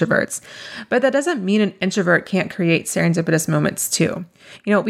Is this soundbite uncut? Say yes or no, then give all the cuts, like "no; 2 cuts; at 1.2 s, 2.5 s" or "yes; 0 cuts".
yes; 0 cuts